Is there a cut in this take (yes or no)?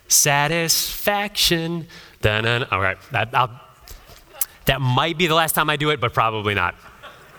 yes